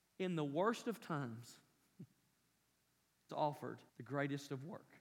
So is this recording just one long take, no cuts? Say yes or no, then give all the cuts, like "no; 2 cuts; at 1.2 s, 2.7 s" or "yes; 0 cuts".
no; 2 cuts; at 3.3 s, 3.9 s